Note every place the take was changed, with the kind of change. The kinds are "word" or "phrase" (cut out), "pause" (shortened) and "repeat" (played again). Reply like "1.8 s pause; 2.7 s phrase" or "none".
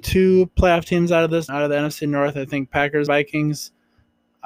1.5 s word; 3.1 s word